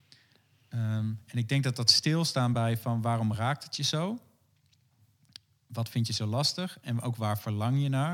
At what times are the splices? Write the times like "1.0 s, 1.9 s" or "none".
none